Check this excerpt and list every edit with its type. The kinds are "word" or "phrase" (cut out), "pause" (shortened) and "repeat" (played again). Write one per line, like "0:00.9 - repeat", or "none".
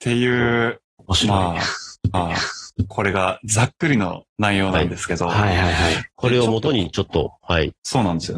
0:02.1 - repeat